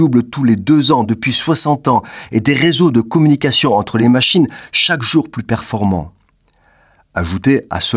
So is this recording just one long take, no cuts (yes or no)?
yes